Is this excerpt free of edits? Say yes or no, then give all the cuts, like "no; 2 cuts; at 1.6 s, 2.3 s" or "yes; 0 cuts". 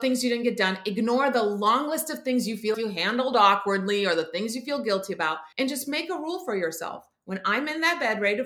no; 2 cuts; at 2.7 s, 5.5 s